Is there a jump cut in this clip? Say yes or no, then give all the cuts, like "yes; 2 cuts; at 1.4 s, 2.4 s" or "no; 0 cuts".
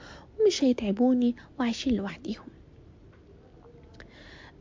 no; 0 cuts